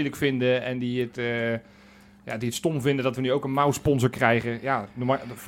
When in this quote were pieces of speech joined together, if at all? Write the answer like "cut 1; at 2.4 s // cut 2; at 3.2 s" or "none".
none